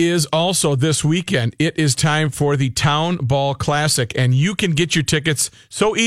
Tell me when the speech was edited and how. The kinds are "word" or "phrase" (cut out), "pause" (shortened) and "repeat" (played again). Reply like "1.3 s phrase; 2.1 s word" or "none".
none